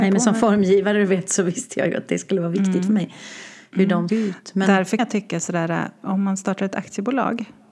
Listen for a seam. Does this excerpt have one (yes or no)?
yes